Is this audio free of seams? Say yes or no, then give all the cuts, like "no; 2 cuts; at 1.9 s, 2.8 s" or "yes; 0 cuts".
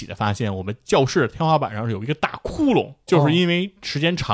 no; 1 cut; at 3.1 s